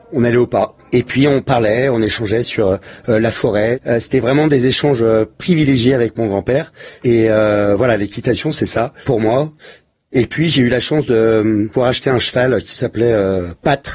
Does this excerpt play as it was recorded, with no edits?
yes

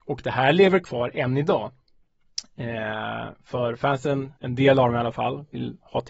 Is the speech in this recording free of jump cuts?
no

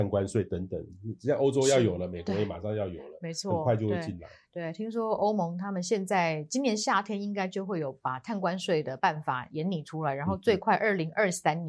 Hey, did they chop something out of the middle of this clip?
no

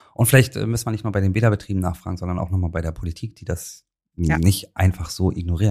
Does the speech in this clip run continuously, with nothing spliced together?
yes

